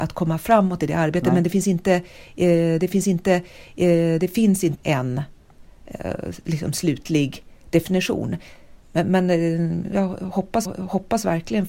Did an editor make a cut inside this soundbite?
yes; 5 cuts; at 2.9 s, 4.8 s, 8.8 s, 9.9 s, 10.6 s

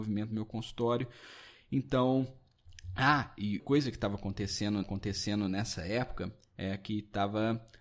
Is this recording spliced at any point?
yes; 2 cuts; at 3.6 s, 4.8 s

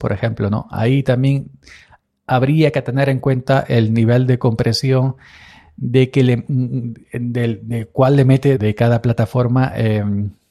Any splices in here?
yes; 1 cut; at 8.6 s

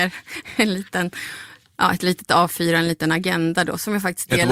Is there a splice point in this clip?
no; 0 cuts

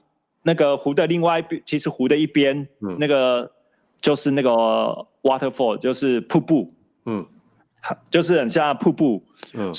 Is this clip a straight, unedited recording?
yes; 0 cuts

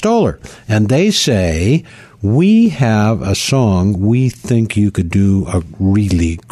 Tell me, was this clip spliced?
no; 0 cuts

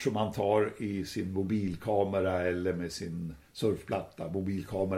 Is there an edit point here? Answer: no; 0 cuts

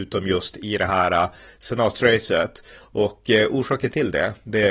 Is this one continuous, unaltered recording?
yes; 0 cuts

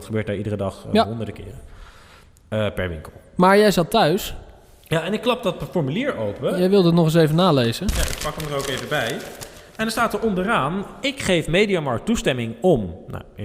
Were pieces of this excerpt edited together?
no; 0 cuts

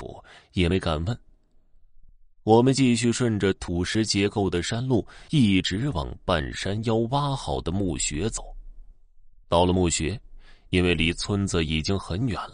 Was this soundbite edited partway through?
no; 0 cuts

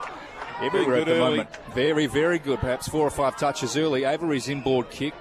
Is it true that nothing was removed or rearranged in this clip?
yes; 0 cuts

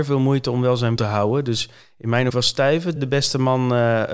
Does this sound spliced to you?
yes; 3 cuts; at 1.0 s, 2.3 s, 3.0 s

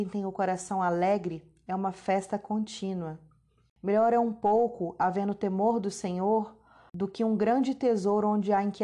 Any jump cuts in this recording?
no; 0 cuts

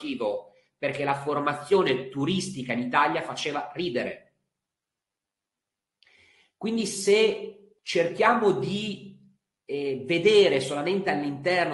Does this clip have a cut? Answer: no; 0 cuts

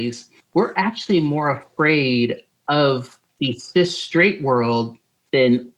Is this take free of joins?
yes; 0 cuts

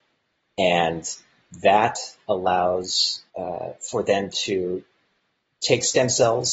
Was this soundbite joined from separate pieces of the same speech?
yes; 1 cut; at 3.3 s

